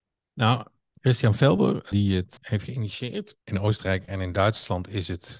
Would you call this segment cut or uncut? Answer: cut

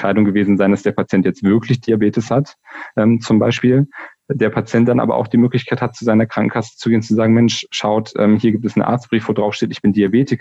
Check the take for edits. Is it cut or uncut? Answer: uncut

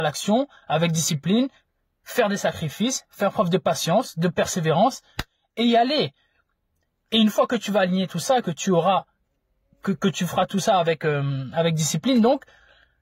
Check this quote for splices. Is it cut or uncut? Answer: uncut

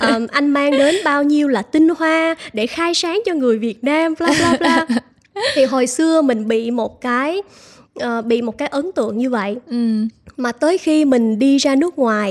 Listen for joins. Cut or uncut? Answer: uncut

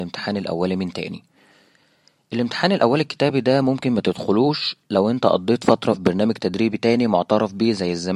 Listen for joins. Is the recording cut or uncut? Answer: uncut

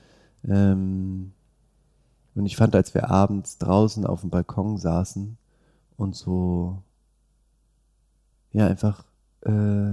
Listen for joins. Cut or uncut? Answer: uncut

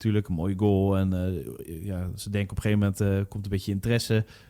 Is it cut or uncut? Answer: uncut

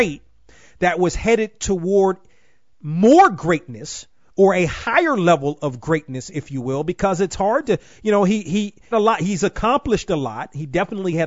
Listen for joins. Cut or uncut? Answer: cut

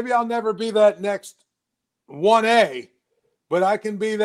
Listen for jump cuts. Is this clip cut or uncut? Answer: uncut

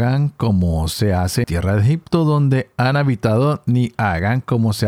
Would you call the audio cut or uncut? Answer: cut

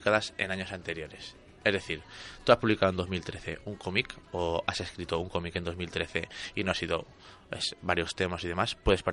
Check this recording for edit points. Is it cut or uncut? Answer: uncut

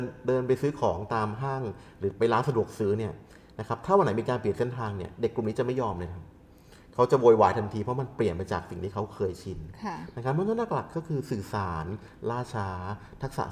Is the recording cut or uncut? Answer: uncut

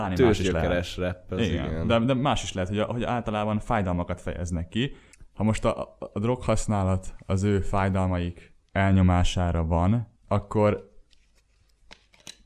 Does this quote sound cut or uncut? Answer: cut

